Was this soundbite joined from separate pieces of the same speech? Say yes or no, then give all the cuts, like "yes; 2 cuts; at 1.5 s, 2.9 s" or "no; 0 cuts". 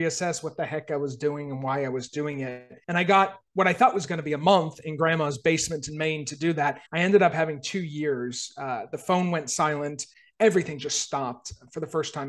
yes; 4 cuts; at 2.8 s, 3.5 s, 6.9 s, 10.1 s